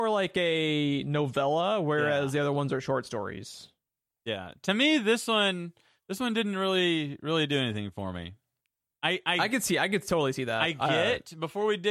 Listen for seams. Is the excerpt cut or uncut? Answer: uncut